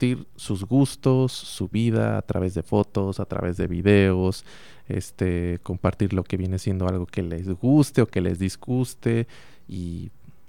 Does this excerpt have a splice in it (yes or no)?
no